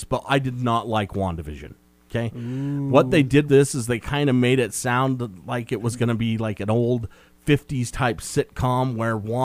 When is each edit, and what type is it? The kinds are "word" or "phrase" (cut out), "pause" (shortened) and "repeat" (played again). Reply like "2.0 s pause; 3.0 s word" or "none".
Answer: 3.5 s word